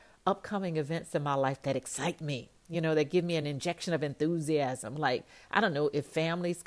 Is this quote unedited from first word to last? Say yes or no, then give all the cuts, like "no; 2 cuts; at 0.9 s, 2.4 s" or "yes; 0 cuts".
yes; 0 cuts